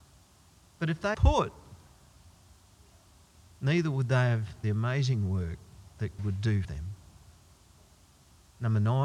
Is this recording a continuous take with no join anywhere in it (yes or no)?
no